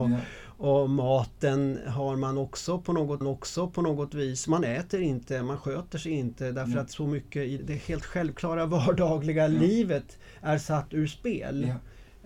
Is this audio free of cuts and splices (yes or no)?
no